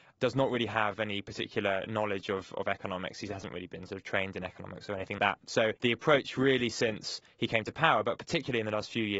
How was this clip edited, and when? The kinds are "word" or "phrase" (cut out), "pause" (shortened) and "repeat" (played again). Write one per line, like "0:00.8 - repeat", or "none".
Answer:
0:05.2 - word
0:05.8 - pause

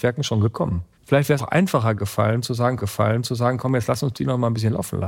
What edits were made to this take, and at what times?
0:00.9 - pause
0:01.4 - word
0:02.8 - repeat

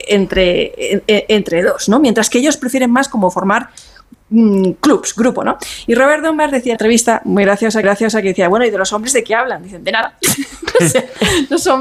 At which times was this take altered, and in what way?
0:06.8 - word
0:07.8 - repeat

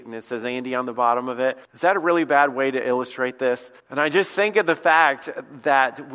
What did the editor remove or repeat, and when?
0:01.6 - pause
0:03.8 - pause

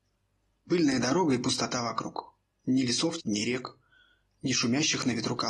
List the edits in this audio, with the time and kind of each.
0:03.2 - word

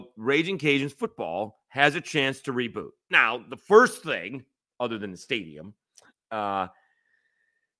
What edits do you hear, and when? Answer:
none

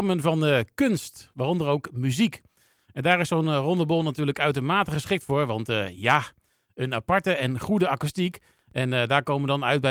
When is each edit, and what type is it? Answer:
none

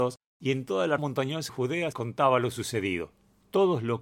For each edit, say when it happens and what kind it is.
0:01.0 - word
0:01.5 - word
0:01.9 - word

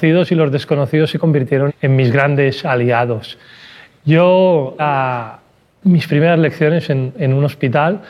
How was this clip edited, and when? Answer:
0:01.7 - word
0:04.8 - word

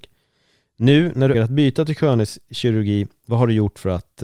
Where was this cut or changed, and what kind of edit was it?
0:01.3 - word

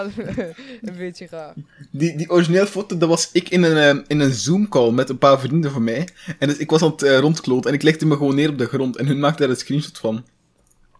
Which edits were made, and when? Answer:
none

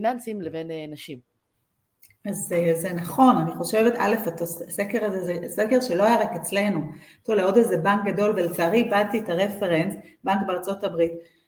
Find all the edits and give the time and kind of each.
none

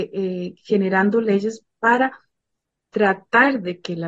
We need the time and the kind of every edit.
none

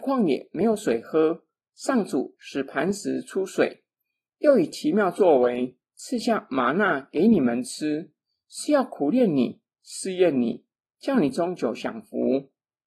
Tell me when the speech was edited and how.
none

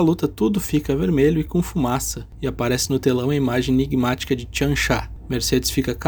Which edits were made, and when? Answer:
none

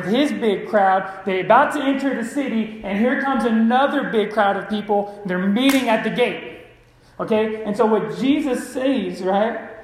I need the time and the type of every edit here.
none

